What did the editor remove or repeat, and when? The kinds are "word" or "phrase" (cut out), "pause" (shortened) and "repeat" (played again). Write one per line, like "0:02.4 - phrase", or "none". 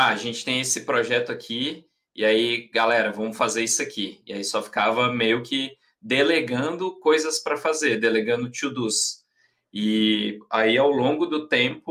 none